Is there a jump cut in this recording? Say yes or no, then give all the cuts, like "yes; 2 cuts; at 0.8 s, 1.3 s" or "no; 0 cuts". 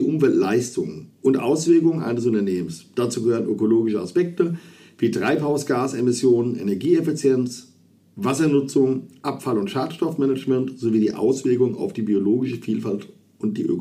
no; 0 cuts